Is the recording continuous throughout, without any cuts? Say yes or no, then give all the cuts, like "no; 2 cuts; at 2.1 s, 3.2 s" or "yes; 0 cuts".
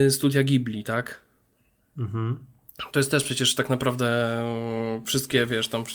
yes; 0 cuts